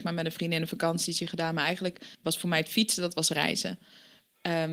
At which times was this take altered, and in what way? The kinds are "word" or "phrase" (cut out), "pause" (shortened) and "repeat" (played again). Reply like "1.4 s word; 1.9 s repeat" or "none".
2.1 s pause